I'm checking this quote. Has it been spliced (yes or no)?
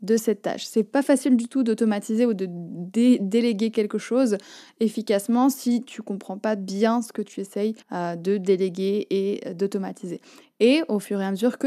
yes